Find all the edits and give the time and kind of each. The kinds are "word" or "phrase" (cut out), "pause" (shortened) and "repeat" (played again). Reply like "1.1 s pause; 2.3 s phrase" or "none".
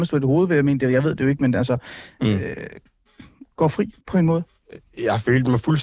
4.0 s pause